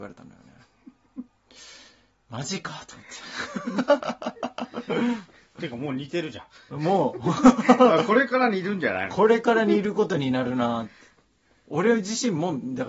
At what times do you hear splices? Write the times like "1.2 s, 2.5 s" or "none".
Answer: none